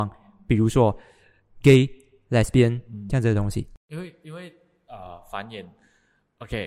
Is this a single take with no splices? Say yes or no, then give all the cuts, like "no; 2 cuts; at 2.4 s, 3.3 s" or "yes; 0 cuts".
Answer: yes; 0 cuts